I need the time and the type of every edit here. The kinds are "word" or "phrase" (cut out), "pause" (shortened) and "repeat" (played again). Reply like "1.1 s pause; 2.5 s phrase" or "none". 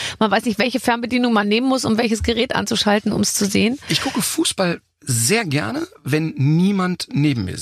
none